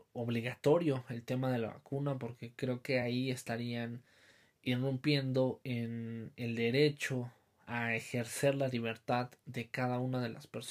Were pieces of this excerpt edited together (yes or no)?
no